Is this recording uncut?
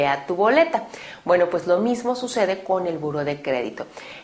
yes; 0 cuts

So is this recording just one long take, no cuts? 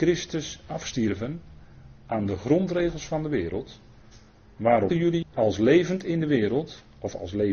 no; 2 cuts; at 4.9 s, 5.2 s

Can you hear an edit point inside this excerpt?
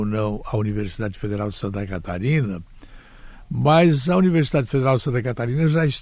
no; 0 cuts

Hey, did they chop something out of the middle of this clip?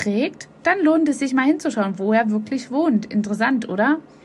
no; 0 cuts

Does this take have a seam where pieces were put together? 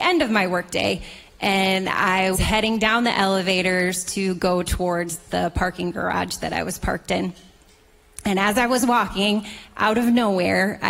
yes; 1 cut; at 2.3 s

